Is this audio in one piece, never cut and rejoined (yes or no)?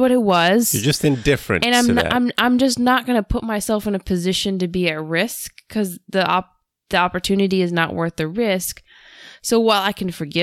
yes